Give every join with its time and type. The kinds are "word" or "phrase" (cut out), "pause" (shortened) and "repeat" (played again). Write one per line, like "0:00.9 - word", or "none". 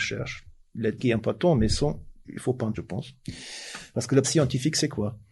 0:01.0 - word
0:02.2 - word
0:02.7 - word
0:04.2 - word